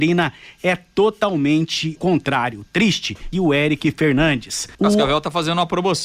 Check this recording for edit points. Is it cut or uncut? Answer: cut